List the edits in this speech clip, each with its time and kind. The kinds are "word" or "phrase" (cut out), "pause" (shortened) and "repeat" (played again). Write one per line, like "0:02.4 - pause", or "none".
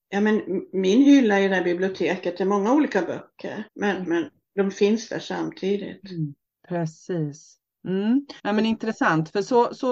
0:03.7 - pause
0:06.5 - pause
0:08.4 - pause